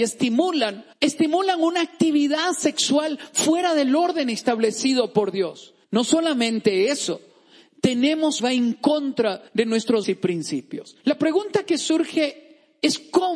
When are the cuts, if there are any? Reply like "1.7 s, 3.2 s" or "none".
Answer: 0.9 s, 5.8 s, 8.4 s, 9.5 s, 10.0 s, 11.0 s